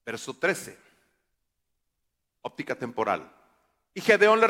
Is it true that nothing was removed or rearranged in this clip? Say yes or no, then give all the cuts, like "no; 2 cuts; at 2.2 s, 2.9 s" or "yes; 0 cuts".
yes; 0 cuts